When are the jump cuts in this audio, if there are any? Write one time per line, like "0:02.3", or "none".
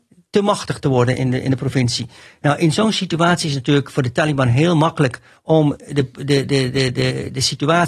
none